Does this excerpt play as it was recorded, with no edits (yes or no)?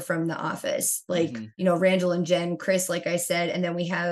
no